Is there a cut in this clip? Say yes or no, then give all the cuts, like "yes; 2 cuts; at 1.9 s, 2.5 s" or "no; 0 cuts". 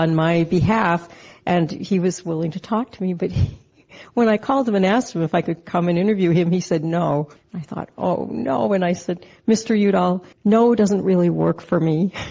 yes; 2 cuts; at 7.4 s, 10.3 s